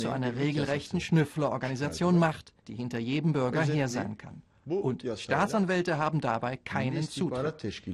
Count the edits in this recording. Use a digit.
1